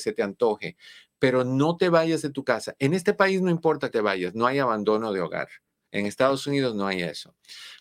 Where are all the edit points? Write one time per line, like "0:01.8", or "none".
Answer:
0:03.9